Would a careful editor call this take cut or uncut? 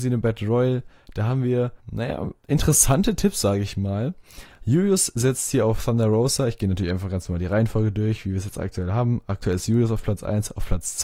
cut